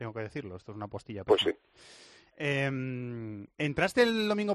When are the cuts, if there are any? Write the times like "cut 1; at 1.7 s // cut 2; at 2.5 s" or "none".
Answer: cut 1; at 3.5 s